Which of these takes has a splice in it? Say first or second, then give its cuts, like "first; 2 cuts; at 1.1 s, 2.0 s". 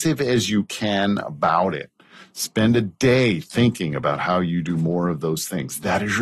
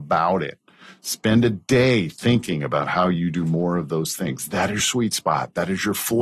second; 1 cut; at 4.8 s